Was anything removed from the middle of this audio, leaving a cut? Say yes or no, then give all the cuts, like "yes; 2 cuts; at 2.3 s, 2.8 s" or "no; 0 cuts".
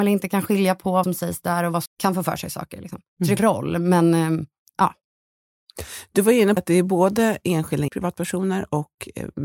yes; 5 cuts; at 1.0 s, 1.9 s, 3.4 s, 6.6 s, 7.9 s